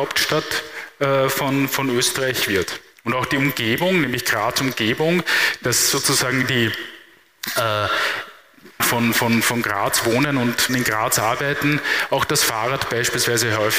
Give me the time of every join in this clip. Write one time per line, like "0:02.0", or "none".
0:02.9
0:08.8
0:10.7